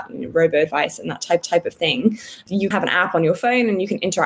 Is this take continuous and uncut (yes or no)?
no